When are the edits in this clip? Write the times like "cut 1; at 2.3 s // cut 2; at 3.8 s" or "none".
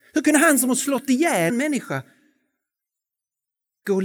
cut 1; at 1.5 s